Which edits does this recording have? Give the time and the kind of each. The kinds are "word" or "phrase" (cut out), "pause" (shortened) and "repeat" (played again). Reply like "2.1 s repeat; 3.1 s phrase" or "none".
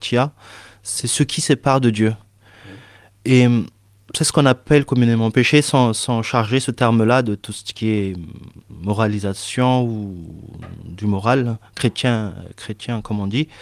none